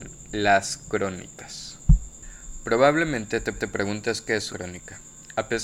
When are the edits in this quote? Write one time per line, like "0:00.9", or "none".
0:03.5
0:04.5